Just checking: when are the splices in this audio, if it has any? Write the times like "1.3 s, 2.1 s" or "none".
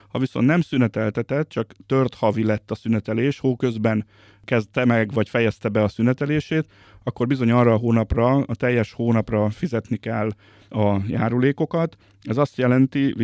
none